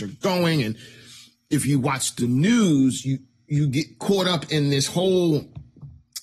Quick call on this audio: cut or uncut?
uncut